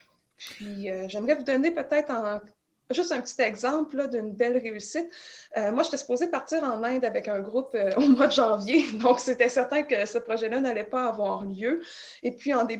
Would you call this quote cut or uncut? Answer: uncut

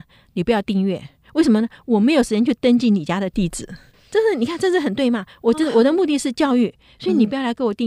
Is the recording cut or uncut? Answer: uncut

